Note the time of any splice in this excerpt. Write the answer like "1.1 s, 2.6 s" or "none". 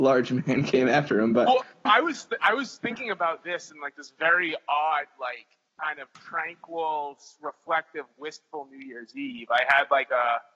1.9 s, 5.7 s